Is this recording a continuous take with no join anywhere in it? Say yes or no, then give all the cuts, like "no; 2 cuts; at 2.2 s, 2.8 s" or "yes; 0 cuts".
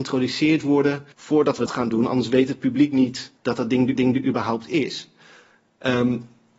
no; 4 cuts; at 1.1 s, 1.7 s, 3.4 s, 4.0 s